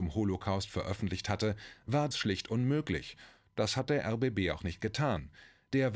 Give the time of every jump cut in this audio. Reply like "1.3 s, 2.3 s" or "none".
2.1 s